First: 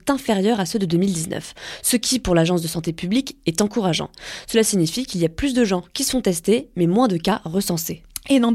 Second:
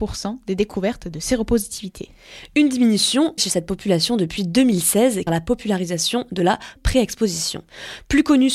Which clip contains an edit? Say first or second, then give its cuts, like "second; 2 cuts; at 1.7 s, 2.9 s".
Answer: second; 3 cuts; at 3.4 s, 5.3 s, 6.8 s